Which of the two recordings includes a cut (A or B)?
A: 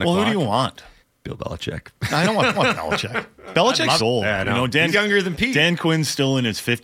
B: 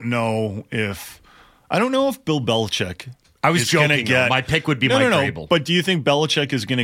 A